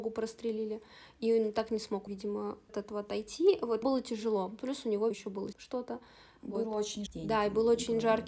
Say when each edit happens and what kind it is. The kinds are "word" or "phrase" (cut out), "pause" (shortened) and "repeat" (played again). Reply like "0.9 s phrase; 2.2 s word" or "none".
2.1 s word; 2.7 s word; 3.8 s word; 5.1 s word; 5.5 s word; 7.1 s word